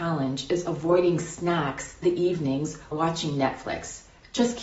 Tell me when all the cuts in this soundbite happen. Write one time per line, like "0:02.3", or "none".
0:02.0
0:02.9